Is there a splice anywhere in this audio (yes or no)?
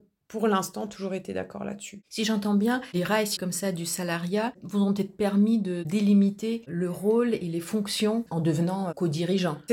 yes